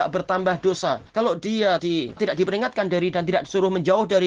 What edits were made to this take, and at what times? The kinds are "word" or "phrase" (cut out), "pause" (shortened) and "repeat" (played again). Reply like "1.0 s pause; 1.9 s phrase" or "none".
1.1 s pause; 1.8 s word; 2.2 s word; 3.1 s word